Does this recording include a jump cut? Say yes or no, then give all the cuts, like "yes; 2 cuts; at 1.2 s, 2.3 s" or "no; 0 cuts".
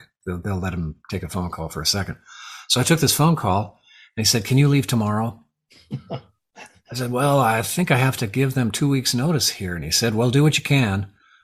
no; 0 cuts